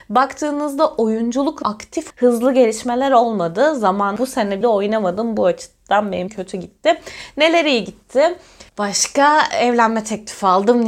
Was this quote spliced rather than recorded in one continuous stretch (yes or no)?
yes